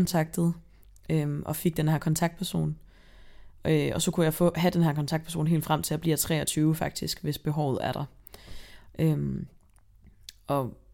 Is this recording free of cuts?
yes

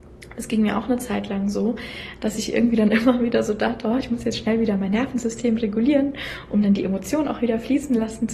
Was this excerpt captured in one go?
yes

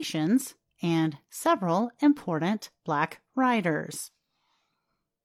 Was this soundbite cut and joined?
no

